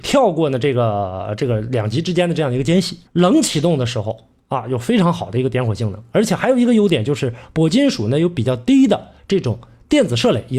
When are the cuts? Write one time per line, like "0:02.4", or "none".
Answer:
0:03.1